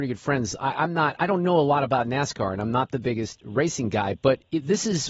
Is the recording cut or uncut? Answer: uncut